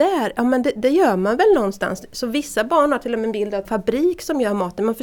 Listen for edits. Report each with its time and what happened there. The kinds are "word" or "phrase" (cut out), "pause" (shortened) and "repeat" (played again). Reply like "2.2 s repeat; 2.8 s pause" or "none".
3.6 s phrase